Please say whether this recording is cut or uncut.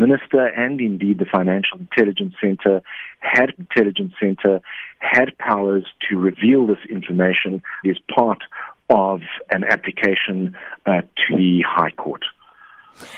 cut